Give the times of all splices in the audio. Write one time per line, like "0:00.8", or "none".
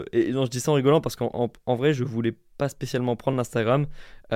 none